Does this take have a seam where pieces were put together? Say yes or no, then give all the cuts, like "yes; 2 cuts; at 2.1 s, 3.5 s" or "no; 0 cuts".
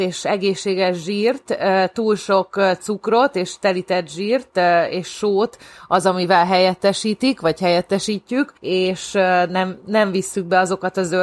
yes; 1 cut; at 8.6 s